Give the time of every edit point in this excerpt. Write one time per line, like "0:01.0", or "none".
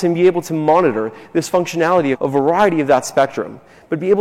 0:02.1